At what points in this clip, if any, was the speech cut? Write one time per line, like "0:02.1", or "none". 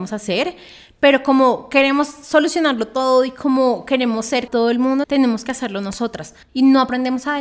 0:04.5
0:05.0
0:06.4